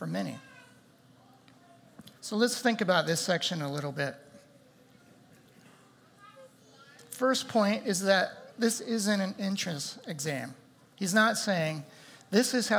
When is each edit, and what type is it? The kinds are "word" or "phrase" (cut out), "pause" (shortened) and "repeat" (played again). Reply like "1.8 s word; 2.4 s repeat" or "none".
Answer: 2.2 s pause